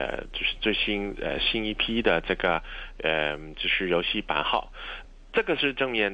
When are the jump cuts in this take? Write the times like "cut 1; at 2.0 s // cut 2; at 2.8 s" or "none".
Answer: cut 1; at 5.0 s